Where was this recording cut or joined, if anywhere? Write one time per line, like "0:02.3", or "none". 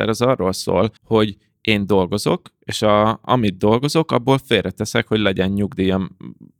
0:01.0

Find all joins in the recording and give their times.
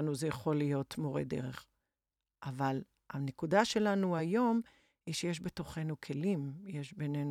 none

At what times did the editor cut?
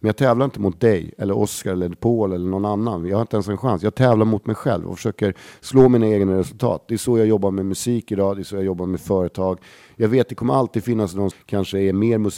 0:11.3

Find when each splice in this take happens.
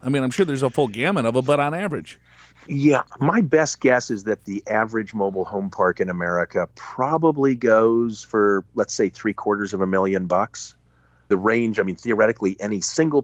none

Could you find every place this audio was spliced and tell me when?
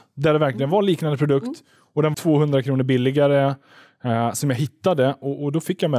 0:02.1

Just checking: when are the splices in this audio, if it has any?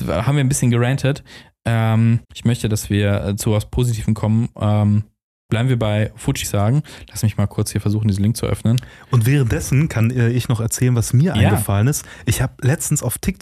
0:02.2
0:06.4

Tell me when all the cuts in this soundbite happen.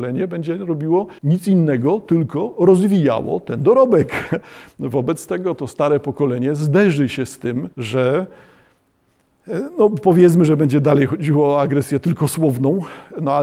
0:01.2
0:07.7

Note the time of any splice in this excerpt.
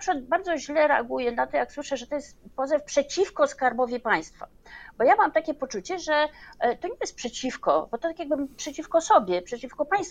none

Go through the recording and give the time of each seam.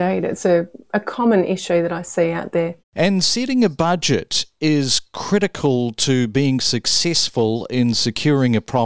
0:02.8

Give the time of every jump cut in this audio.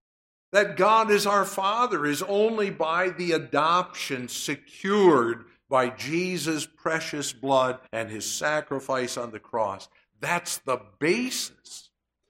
0:07.9

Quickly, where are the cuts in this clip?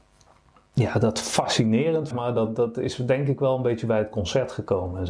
0:02.1

